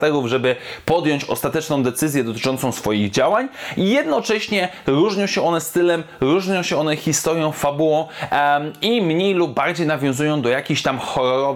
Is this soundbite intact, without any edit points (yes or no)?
yes